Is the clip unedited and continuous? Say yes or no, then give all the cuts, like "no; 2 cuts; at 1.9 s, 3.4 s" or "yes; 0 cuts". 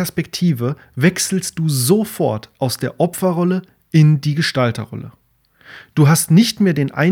yes; 0 cuts